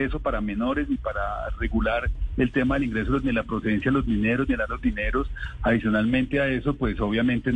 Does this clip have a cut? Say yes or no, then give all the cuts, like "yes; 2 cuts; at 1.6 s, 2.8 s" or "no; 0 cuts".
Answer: yes; 2 cuts; at 3.2 s, 4.7 s